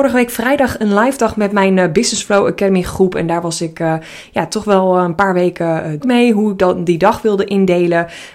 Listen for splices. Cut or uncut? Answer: cut